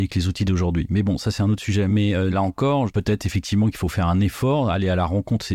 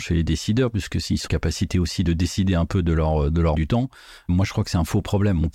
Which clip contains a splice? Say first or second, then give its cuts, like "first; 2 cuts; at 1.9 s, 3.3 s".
second; 2 cuts; at 1.3 s, 3.5 s